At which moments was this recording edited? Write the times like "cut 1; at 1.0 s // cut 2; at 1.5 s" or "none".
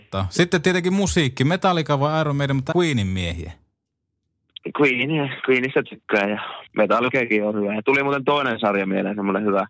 cut 1; at 2.7 s // cut 2; at 6.7 s

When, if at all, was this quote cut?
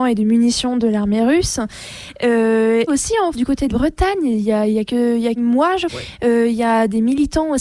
cut 1; at 2.9 s // cut 2; at 3.3 s // cut 3; at 3.7 s // cut 4; at 4.9 s // cut 5; at 5.4 s // cut 6; at 5.9 s

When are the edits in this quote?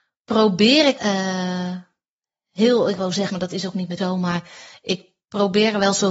cut 1; at 1.0 s // cut 2; at 3.0 s // cut 3; at 3.3 s // cut 4; at 4.0 s

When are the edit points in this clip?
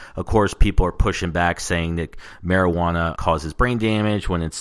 none

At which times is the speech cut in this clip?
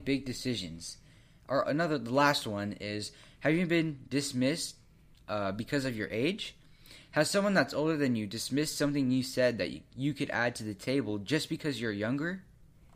cut 1; at 1.6 s

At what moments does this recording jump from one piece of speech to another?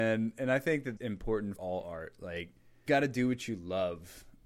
cut 1; at 1.0 s // cut 2; at 1.6 s // cut 3; at 2.9 s

